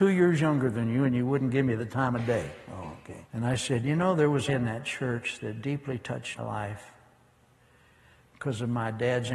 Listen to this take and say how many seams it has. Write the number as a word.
three